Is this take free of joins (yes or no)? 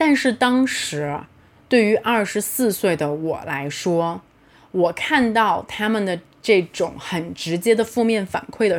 yes